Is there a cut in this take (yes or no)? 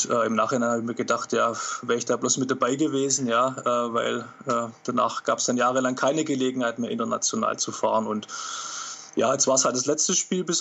no